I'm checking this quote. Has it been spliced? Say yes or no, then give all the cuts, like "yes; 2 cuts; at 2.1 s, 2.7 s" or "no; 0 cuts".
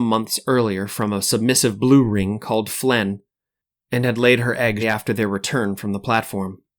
yes; 1 cut; at 4.8 s